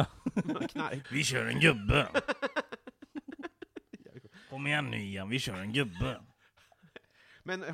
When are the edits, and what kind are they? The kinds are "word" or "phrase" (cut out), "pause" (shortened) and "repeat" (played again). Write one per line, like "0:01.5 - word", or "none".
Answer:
0:01.0 - word

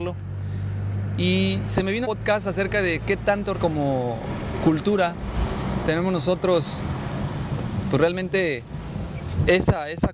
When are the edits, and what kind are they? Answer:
0:02.0 - phrase
0:03.5 - word

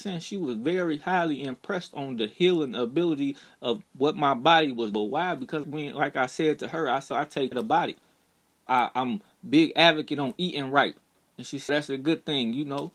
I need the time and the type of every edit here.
0:04.9 - word
0:05.6 - word
0:07.1 - word
0:07.5 - word
0:08.7 - word
0:11.7 - word

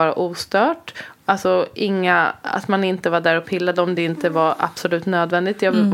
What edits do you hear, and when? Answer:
none

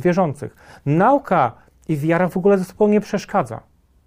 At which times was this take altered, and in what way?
none

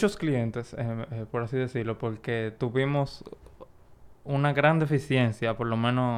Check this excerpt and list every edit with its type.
none

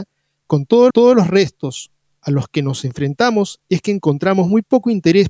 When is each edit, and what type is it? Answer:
0:00.9 - repeat

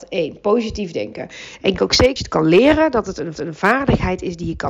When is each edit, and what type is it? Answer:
0:01.8 - word
0:02.2 - word
0:03.4 - repeat

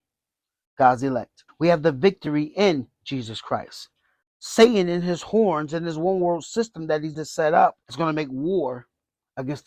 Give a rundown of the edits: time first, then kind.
0:04.2 - pause
0:07.1 - word

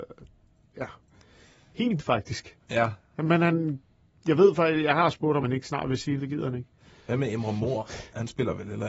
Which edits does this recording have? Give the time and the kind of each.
0:02.0 - word
0:05.4 - word
0:06.2 - word

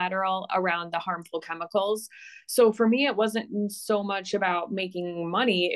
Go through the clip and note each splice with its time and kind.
none

